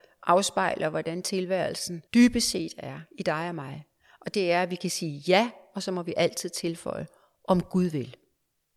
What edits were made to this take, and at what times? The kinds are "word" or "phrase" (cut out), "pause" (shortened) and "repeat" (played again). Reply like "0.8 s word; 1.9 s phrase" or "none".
2.1 s pause